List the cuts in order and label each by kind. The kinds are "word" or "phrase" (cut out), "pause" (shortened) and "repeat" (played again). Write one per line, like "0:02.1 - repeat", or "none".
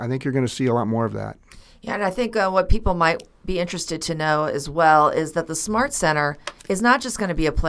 0:06.6 - pause